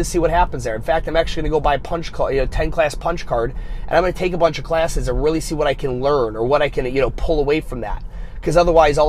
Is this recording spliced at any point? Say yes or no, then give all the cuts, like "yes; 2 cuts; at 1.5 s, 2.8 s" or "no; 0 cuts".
no; 0 cuts